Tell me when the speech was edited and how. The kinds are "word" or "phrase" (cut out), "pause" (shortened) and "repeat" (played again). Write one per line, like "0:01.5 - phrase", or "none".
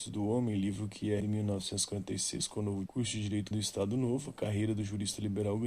0:01.2 - word
0:02.9 - word
0:03.5 - phrase

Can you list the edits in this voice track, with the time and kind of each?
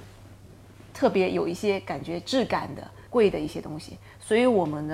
0:03.1 - pause

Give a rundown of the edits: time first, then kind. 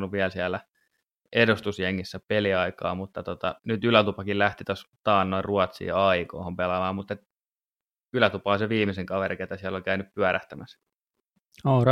0:03.6 - pause

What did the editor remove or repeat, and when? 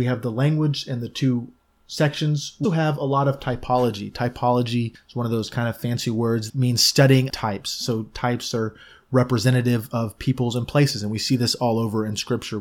0:02.6 - word
0:06.5 - word
0:07.3 - word

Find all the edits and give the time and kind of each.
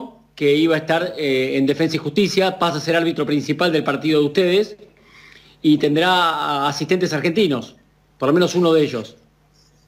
none

